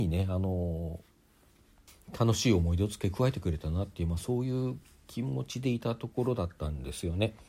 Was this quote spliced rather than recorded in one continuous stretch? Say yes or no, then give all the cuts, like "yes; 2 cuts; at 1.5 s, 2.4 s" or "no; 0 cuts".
no; 0 cuts